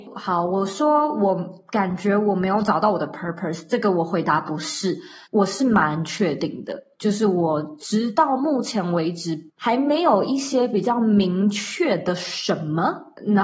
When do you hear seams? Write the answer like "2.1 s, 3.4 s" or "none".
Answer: 9.5 s

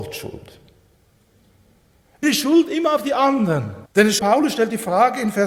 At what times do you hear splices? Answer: 2.2 s, 3.9 s, 4.2 s

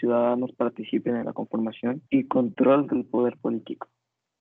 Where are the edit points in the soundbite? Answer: 2.1 s

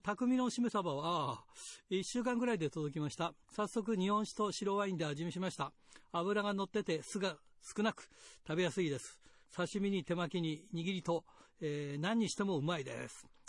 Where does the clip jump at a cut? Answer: 3.4 s

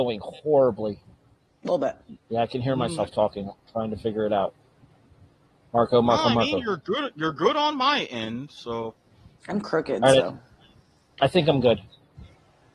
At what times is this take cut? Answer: 2.2 s

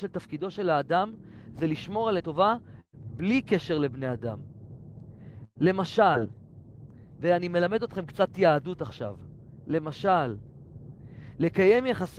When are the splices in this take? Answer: 2.2 s

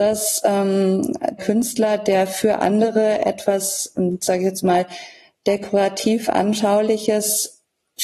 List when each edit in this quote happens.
1.4 s

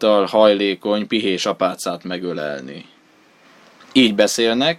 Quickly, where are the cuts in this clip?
none

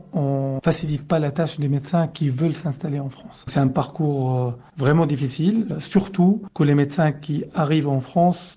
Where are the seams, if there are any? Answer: none

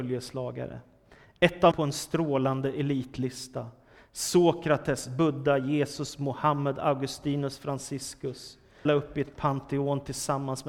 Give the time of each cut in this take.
1.7 s, 8.9 s

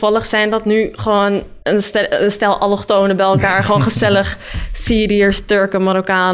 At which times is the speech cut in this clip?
1.6 s

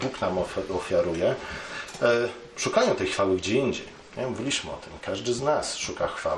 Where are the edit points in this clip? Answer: none

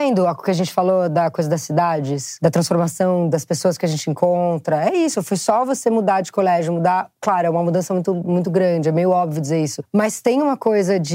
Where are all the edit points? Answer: none

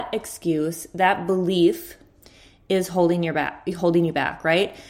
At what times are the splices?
none

